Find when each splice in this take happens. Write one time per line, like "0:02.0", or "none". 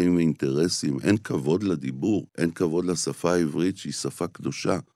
0:02.3